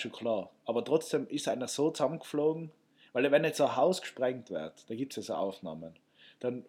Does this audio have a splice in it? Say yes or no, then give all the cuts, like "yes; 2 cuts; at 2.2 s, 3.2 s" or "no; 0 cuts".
no; 0 cuts